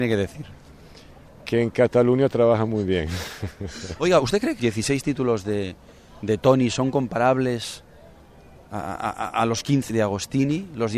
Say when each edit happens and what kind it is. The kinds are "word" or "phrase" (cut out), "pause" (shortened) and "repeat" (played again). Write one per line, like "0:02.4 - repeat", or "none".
0:04.6 - word
0:09.9 - word